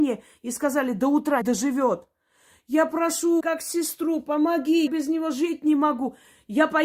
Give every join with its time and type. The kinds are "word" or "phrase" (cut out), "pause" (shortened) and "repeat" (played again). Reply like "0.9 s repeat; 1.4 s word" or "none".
1.4 s word; 3.4 s word; 4.9 s word

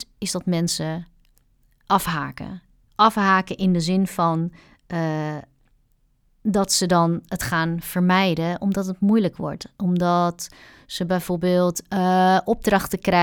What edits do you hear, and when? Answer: none

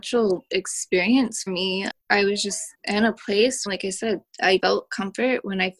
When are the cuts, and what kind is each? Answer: 1.5 s word; 1.9 s word; 2.7 s pause; 3.7 s phrase; 4.6 s word

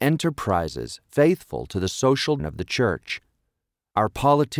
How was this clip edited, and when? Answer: 2.4 s word

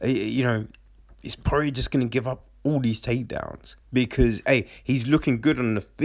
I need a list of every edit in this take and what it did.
3.8 s pause

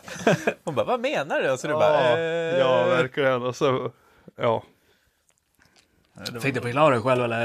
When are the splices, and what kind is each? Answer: none

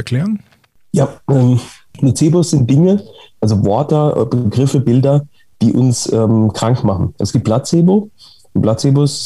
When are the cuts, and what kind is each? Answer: none

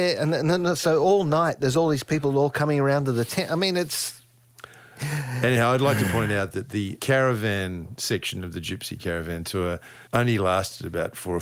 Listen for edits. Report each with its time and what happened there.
7.0 s phrase; 10.1 s pause

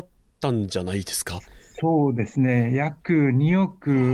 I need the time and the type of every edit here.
none

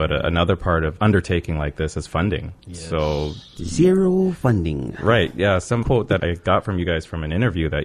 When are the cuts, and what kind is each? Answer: 1.0 s phrase; 2.6 s pause; 5.8 s word; 6.2 s word

